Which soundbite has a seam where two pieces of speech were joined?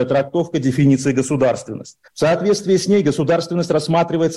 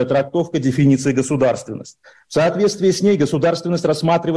first; 1 cut; at 2.1 s

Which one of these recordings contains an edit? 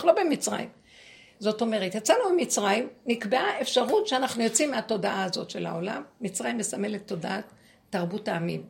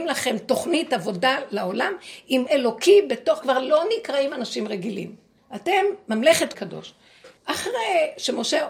second; 5 cuts; at 2.5 s, 3.4 s, 5.4 s, 6.5 s, 7.4 s

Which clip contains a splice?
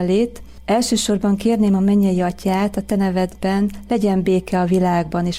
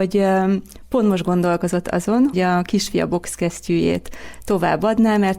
second; 1 cut; at 2.3 s

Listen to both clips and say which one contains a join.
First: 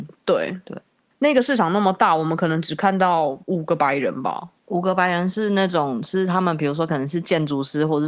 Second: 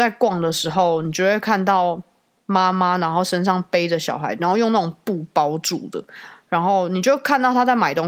first; 2 cuts; at 3.4 s, 4.6 s

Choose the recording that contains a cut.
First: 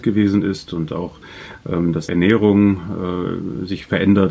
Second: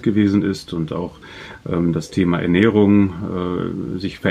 first; 1 cut; at 2.1 s

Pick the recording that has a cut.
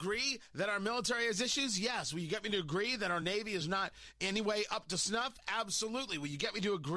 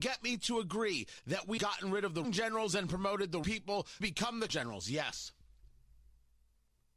second; 5 cuts; at 1.6 s, 2.2 s, 3.4 s, 4.0 s, 4.5 s

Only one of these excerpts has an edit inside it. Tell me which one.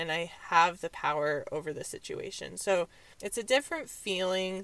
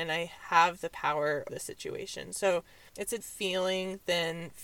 second; 2 cuts; at 1.5 s, 3.2 s

